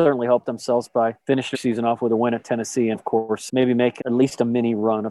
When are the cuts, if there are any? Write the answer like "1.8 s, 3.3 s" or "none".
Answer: 1.5 s, 2.9 s, 3.5 s, 4.0 s